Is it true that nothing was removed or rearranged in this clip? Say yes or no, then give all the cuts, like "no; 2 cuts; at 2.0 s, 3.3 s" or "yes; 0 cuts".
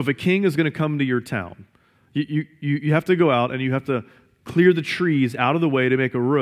yes; 0 cuts